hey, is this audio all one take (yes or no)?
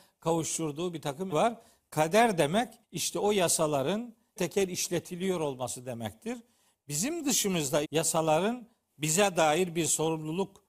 no